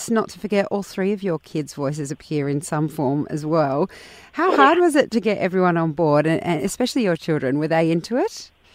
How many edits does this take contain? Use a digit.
0